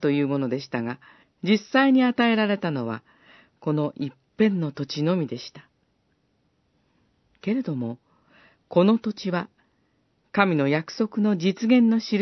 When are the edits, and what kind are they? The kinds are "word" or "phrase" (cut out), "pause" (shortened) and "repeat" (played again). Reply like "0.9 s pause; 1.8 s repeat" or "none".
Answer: 1.2 s pause